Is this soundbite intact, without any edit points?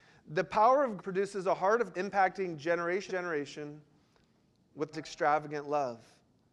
no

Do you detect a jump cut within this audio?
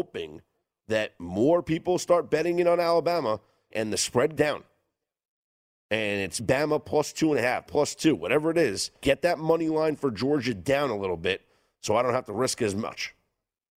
yes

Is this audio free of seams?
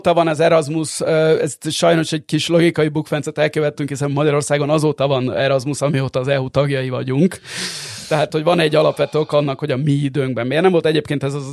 yes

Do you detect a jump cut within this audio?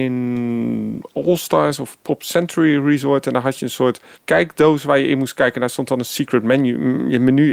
yes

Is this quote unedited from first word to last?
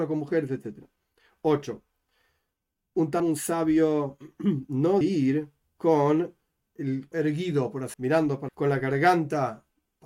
no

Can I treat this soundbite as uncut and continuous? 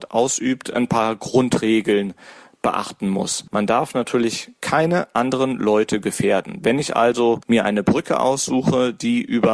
no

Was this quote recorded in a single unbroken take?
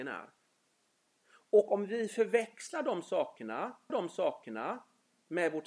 no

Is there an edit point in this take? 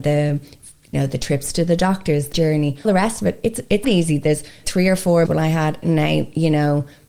yes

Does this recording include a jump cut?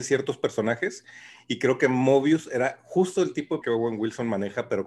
yes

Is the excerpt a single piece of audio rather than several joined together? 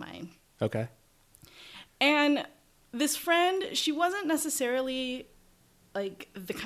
yes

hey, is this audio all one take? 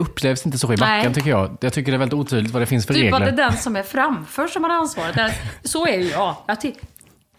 yes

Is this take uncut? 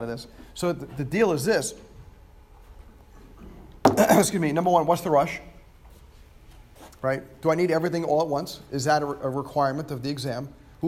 yes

